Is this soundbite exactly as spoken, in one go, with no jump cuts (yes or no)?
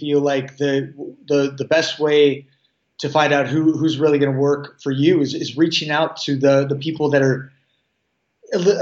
yes